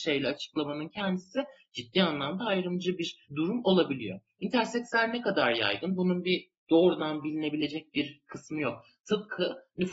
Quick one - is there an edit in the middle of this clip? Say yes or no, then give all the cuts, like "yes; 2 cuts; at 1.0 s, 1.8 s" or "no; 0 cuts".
yes; 2 cuts; at 3.2 s, 6.6 s